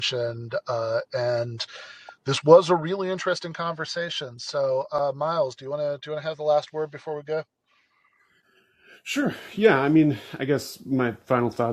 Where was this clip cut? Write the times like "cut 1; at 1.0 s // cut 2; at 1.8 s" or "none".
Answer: none

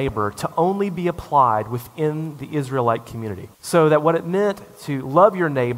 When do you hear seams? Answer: cut 1; at 3.5 s

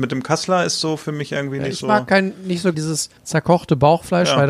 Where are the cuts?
cut 1; at 2.7 s // cut 2; at 3.2 s

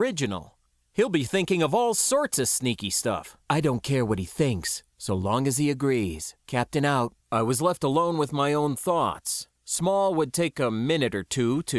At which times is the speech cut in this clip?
cut 1; at 3.4 s // cut 2; at 6.4 s // cut 3; at 7.2 s // cut 4; at 9.6 s

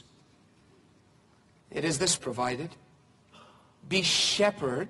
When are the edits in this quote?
cut 1; at 2.2 s

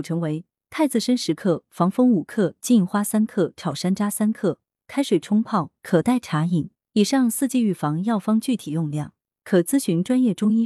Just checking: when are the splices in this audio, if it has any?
none

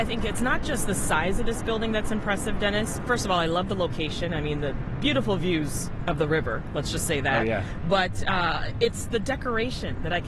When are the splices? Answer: none

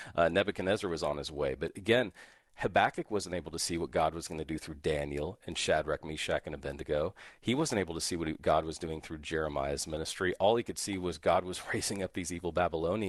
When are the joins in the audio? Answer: none

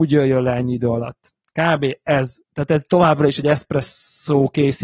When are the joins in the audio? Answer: cut 1; at 2.4 s

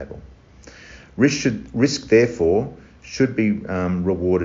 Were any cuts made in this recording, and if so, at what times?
none

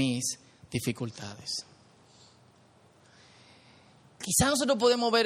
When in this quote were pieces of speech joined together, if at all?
none

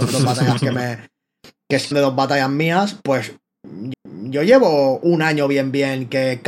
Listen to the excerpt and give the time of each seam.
cut 1; at 1.9 s // cut 2; at 3.9 s

